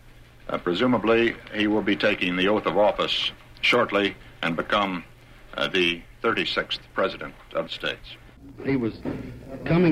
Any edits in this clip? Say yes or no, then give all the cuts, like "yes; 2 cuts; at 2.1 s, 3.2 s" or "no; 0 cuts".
yes; 1 cut; at 7.7 s